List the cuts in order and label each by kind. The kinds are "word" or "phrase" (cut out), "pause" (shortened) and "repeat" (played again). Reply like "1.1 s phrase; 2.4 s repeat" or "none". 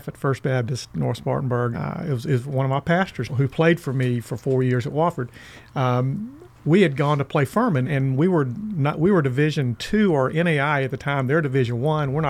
1.7 s word; 3.3 s word; 7.8 s word